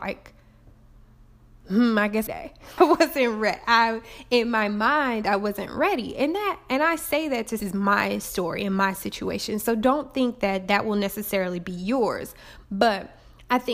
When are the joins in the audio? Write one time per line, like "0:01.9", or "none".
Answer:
0:02.3
0:02.8
0:07.6